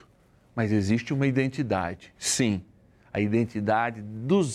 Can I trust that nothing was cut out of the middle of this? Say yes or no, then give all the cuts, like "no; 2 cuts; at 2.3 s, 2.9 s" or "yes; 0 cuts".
yes; 0 cuts